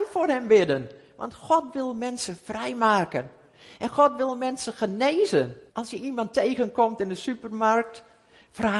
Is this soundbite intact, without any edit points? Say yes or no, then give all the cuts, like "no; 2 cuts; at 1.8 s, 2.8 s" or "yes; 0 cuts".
no; 1 cut; at 5.7 s